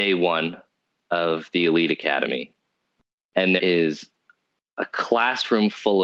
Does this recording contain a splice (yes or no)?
yes